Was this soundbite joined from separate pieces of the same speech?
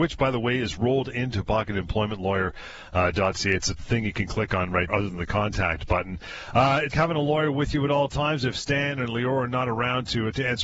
yes; 3 cuts; at 3.8 s, 4.9 s, 6.9 s

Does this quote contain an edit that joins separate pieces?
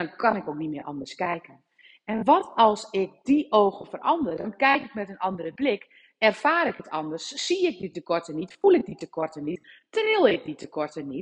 no; 0 cuts

